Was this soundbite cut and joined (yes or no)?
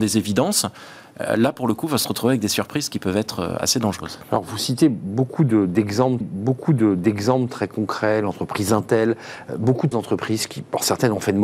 yes